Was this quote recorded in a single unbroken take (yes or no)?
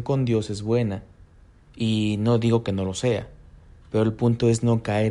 yes